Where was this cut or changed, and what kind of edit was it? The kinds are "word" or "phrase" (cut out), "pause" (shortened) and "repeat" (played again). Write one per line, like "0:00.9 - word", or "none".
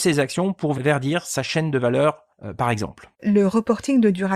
0:02.3 - pause